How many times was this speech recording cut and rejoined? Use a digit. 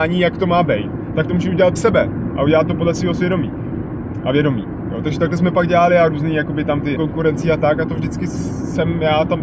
3